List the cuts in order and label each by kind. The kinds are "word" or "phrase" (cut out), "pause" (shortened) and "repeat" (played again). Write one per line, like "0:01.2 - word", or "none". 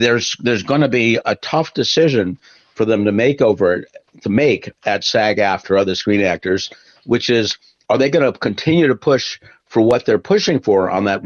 0:01.2 - word